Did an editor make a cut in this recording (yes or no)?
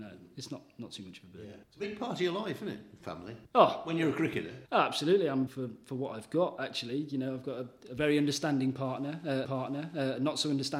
yes